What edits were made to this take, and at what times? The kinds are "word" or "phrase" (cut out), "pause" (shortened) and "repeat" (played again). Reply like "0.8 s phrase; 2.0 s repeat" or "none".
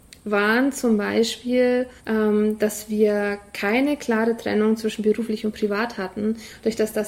2.0 s pause